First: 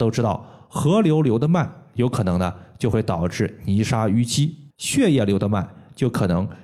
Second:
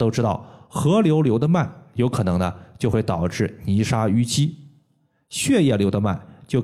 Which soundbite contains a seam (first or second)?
first